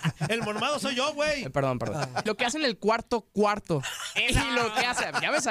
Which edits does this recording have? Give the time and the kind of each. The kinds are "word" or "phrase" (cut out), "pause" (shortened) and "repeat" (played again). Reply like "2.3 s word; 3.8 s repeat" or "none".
2.3 s word